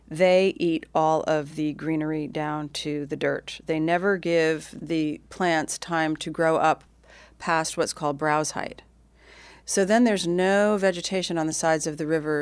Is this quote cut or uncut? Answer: uncut